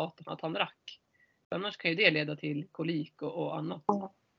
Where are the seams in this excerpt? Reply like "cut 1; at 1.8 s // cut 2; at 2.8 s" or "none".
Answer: none